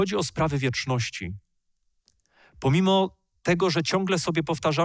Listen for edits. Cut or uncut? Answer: uncut